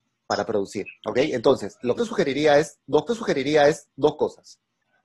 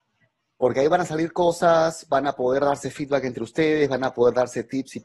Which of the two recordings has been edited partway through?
first; 3 cuts; at 0.9 s, 2.0 s, 3.1 s

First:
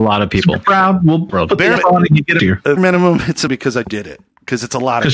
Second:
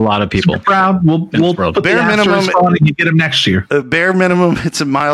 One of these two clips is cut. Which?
first; 6 cuts; at 1.3 s, 1.8 s, 2.4 s, 2.8 s, 3.5 s, 3.8 s

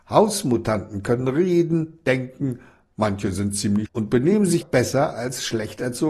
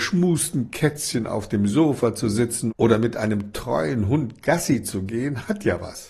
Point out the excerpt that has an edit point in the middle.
first; 2 cuts; at 3.9 s, 4.6 s

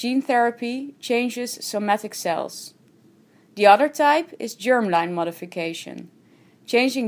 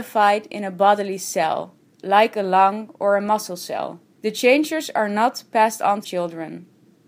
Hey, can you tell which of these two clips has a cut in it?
second; 2 cuts; at 4.1 s, 6.0 s

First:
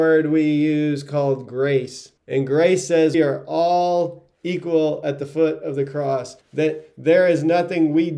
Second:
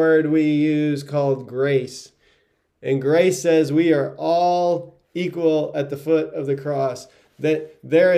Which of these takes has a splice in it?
first; 3 cuts; at 2.2 s, 3.1 s, 6.4 s

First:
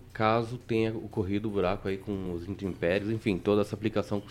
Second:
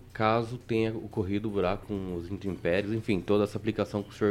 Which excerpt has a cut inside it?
second; 1 cut; at 1.8 s

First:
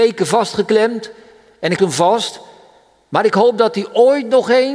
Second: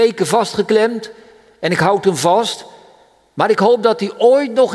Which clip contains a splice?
first; 1 cut; at 1.8 s

